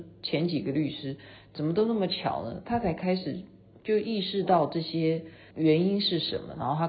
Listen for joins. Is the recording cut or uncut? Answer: cut